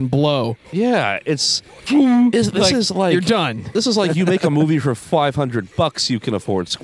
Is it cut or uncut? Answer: uncut